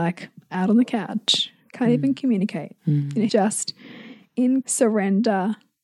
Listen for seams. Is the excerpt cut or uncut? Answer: cut